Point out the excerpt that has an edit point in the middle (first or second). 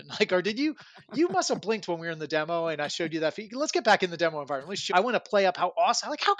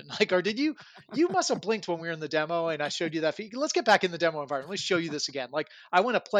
first